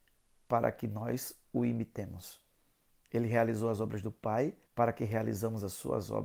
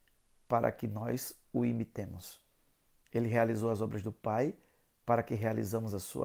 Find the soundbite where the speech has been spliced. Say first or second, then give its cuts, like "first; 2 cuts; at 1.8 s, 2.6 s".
first; 1 cut; at 4.7 s